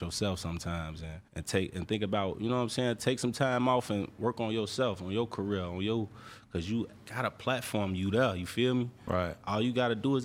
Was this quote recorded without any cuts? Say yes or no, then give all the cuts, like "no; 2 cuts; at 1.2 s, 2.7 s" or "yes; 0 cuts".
no; 1 cut; at 1.3 s